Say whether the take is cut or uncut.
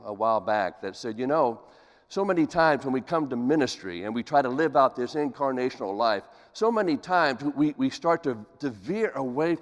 uncut